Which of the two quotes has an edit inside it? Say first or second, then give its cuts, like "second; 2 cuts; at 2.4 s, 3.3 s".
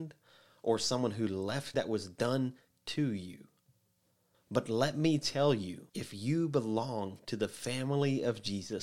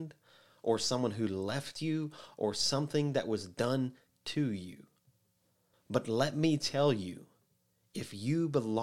first; 2 cuts; at 1.7 s, 5.9 s